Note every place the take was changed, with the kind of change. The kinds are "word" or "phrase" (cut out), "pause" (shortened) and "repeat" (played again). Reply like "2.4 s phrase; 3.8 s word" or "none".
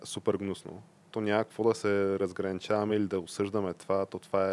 none